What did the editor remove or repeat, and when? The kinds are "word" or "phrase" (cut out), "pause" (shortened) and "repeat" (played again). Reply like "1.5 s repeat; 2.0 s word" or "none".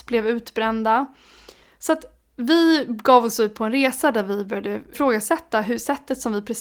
4.9 s word